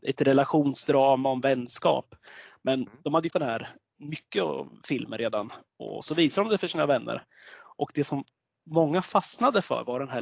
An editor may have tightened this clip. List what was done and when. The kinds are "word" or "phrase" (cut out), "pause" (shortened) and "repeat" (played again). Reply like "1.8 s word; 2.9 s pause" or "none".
3.3 s word; 5.7 s pause